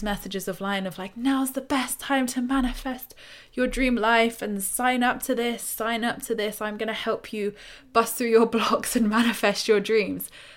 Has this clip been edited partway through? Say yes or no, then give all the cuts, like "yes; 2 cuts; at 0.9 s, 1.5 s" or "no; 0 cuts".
no; 0 cuts